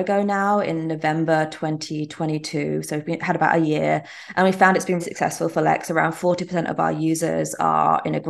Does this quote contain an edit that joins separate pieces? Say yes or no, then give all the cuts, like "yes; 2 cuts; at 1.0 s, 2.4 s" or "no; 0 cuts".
yes; 1 cut; at 5.0 s